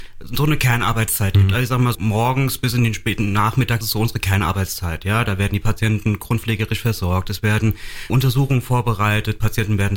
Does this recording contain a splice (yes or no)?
yes